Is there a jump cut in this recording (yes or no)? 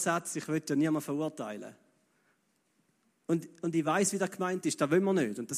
no